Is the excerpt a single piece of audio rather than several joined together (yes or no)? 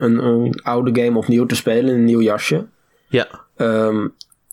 yes